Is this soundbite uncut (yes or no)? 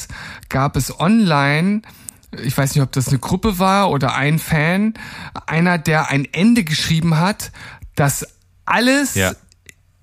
yes